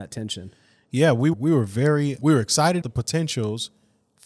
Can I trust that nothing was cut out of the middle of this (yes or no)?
no